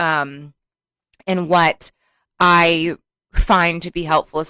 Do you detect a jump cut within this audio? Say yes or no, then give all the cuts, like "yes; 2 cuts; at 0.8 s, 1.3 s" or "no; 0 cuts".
no; 0 cuts